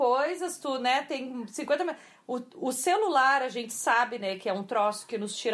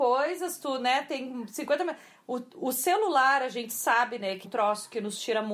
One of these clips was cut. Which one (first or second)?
second